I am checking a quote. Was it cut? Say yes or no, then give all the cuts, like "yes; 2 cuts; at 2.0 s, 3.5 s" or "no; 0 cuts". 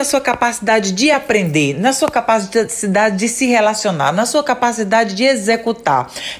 no; 0 cuts